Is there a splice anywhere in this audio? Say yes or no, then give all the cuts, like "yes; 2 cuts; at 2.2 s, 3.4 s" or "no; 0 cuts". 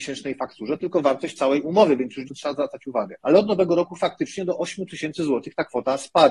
yes; 2 cuts; at 2.3 s, 3.2 s